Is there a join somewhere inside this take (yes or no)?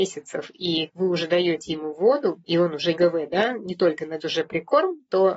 yes